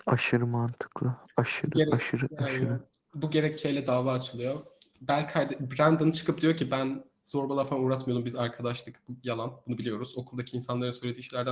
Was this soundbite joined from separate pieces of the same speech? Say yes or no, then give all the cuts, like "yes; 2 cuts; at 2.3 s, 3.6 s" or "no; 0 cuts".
no; 0 cuts